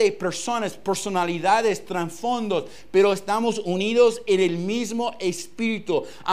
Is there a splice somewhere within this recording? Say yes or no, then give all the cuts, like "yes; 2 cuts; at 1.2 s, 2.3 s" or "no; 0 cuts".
no; 0 cuts